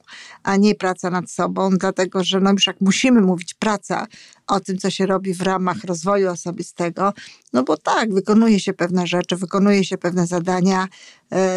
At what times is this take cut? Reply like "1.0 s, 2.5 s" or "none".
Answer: none